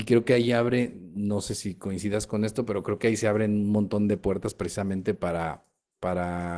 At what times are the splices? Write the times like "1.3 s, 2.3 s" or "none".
none